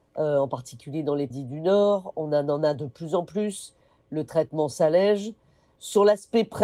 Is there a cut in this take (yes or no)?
yes